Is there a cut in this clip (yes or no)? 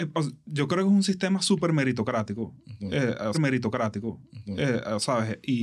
yes